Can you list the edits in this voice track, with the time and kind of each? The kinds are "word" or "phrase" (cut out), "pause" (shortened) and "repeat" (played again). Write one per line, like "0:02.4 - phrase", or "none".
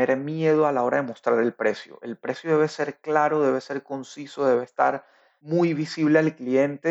none

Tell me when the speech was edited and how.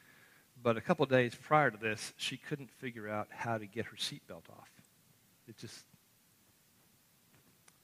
none

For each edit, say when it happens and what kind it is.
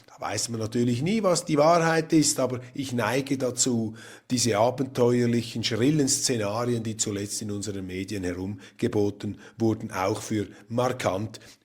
none

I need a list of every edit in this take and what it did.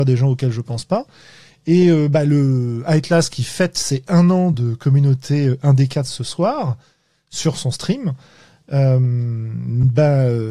none

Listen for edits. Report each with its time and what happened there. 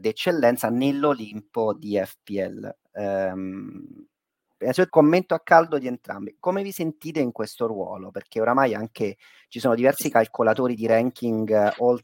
0:04.9 - word

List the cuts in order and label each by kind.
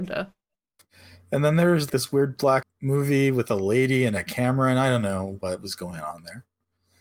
0:01.9 - word
0:02.6 - phrase

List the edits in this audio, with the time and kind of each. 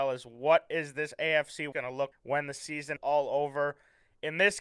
0:01.7 - word
0:02.1 - word
0:03.0 - word

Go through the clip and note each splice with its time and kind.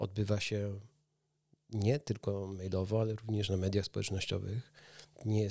none

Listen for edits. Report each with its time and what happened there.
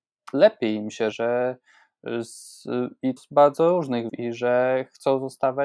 0:01.1 - word
0:03.2 - word
0:04.1 - word

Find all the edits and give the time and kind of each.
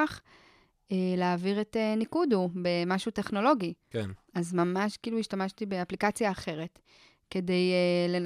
none

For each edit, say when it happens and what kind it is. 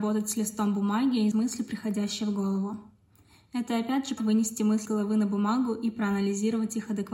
0:01.3 - word
0:04.2 - word
0:04.9 - word

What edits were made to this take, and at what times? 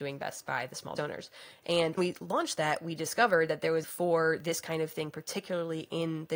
0:01.0 - word
0:02.0 - word
0:03.8 - phrase

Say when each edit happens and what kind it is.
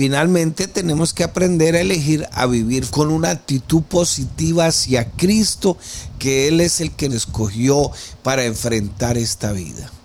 0:02.9 - phrase
0:07.1 - word

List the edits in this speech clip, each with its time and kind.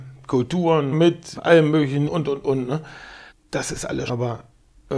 0:00.9 - word
0:01.3 - word
0:02.1 - word
0:03.3 - pause
0:04.1 - word

